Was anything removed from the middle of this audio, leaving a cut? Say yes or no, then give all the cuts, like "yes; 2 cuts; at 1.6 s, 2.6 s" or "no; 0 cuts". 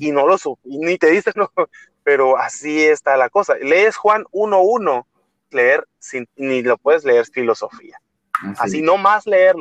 yes; 4 cuts; at 1.3 s, 5.5 s, 6.3 s, 7.3 s